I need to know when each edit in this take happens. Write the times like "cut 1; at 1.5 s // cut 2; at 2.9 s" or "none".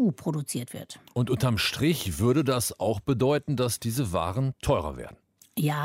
none